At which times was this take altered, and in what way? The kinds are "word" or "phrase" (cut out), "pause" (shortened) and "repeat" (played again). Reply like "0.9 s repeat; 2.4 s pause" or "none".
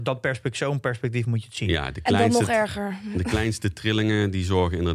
none